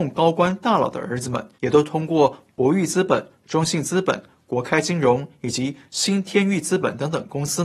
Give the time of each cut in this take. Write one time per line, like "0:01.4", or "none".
0:01.5